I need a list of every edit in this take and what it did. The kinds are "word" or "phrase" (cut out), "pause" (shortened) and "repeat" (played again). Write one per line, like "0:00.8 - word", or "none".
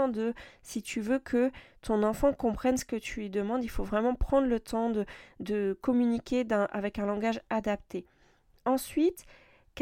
none